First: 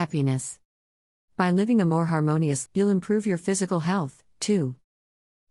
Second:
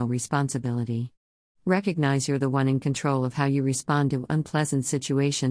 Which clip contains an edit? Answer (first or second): first